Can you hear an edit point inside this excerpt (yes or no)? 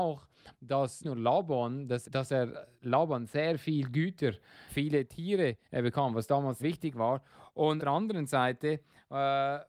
yes